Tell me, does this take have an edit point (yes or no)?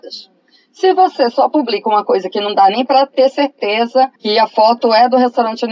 yes